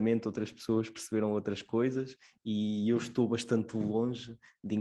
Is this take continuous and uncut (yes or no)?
yes